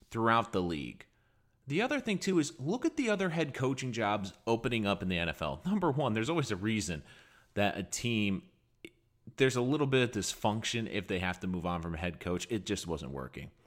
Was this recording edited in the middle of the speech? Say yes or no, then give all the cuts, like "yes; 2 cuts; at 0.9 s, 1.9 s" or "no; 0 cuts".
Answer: no; 0 cuts